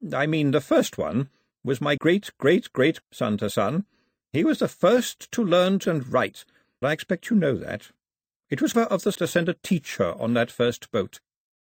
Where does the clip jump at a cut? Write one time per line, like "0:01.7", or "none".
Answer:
0:02.0
0:03.0
0:05.8
0:06.8
0:08.7
0:09.2